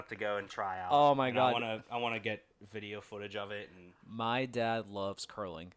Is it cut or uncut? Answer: cut